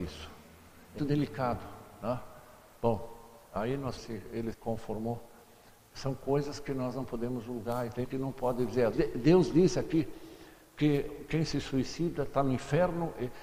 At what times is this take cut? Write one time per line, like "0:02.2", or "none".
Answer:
0:01.0
0:03.5
0:04.0
0:04.5
0:08.0
0:08.9